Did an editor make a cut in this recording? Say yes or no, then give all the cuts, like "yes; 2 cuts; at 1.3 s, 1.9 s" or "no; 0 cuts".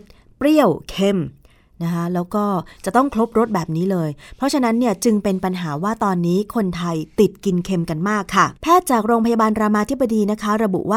yes; 1 cut; at 8.6 s